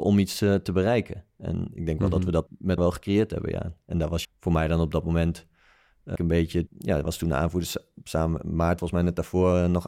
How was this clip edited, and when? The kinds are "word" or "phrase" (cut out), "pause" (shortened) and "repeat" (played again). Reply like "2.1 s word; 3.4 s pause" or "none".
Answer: 2.5 s word; 2.8 s word; 4.2 s word; 6.2 s word; 6.7 s word; 7.0 s word; 8.8 s word